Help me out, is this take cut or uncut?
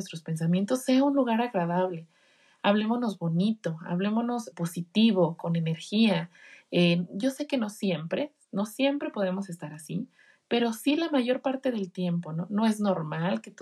cut